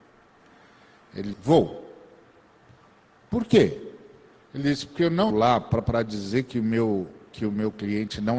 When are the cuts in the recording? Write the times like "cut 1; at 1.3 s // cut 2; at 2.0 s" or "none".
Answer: cut 1; at 1.3 s // cut 2; at 5.3 s // cut 3; at 5.8 s